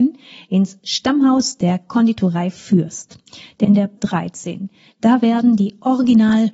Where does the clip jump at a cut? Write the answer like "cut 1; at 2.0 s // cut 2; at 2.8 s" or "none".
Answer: cut 1; at 3.6 s // cut 2; at 4.0 s

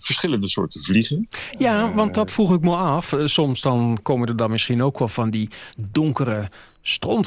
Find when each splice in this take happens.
none

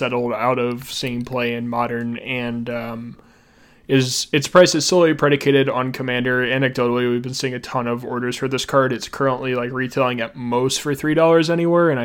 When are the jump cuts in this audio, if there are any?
none

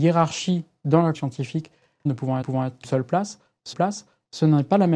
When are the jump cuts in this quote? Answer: cut 1; at 1.1 s // cut 2; at 2.1 s // cut 3; at 2.4 s // cut 4; at 2.8 s // cut 5; at 3.7 s

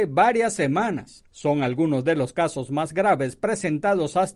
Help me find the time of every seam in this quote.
cut 1; at 1.3 s

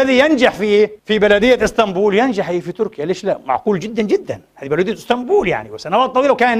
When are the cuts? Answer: cut 1; at 1.0 s

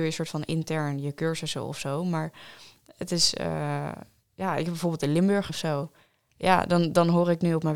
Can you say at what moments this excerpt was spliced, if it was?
cut 1; at 5.5 s

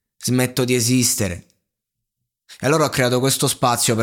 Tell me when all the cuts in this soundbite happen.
none

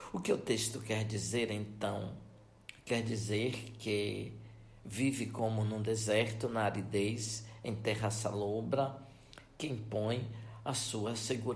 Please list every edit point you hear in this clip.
none

